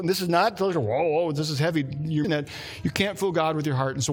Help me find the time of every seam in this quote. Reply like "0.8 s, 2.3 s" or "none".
2.2 s